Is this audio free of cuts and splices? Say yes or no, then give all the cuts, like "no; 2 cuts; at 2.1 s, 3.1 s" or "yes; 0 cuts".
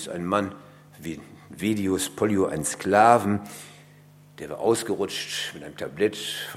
yes; 0 cuts